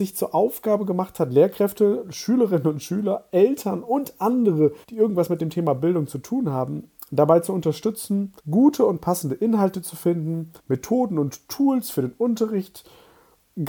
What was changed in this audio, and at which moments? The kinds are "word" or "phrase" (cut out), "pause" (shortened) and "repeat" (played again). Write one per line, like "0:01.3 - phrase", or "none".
0:04.8 - pause
0:08.4 - pause
0:10.6 - pause